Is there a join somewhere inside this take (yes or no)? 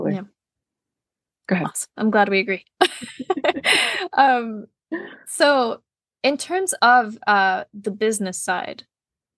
no